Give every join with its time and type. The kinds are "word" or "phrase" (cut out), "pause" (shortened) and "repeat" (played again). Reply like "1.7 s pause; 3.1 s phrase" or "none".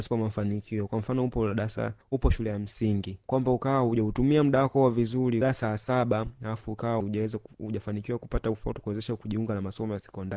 2.0 s pause; 3.2 s pause; 5.4 s word; 7.0 s word; 8.7 s word